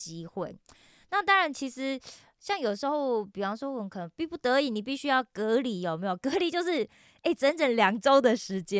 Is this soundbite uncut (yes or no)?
yes